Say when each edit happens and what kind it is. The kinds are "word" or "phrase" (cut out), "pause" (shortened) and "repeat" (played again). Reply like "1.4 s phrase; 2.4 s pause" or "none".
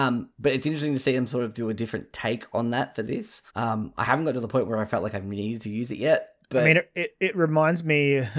3.5 s pause